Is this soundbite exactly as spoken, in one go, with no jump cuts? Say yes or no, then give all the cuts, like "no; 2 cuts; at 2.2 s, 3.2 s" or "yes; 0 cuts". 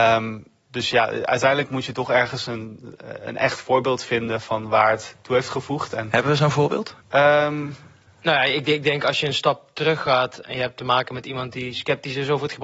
no; 1 cut; at 7.0 s